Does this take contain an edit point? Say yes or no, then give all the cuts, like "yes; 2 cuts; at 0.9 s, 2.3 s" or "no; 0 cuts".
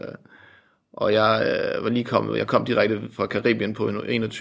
no; 0 cuts